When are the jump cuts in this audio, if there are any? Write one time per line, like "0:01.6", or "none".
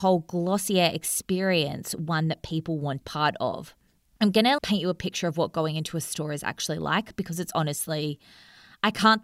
0:03.0
0:04.6